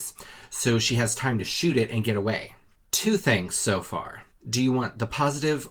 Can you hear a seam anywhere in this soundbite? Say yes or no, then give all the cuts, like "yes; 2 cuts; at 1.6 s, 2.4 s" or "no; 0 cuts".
no; 0 cuts